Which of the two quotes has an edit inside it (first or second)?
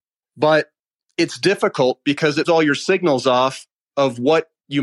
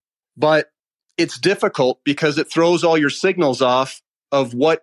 first